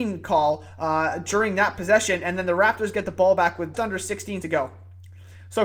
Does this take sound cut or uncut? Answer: cut